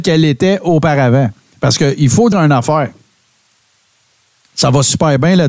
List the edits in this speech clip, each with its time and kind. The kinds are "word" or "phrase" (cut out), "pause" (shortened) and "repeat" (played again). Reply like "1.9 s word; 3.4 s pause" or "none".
2.3 s word